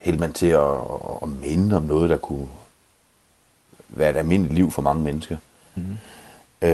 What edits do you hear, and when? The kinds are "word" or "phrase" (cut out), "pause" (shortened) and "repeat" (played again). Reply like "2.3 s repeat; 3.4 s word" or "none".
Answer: none